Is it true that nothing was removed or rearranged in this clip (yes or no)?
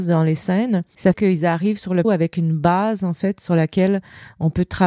no